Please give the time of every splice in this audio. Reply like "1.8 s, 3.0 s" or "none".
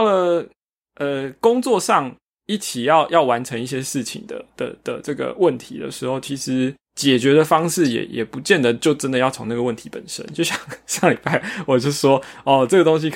6.8 s